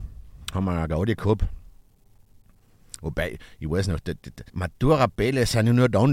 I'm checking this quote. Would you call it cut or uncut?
cut